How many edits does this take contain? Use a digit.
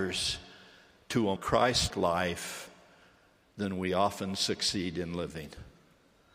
2